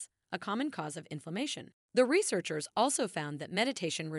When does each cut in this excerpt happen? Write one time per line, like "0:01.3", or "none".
0:01.8